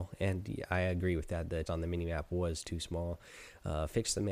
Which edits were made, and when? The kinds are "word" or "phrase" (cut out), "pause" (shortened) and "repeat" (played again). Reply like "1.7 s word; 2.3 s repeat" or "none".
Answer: 1.7 s word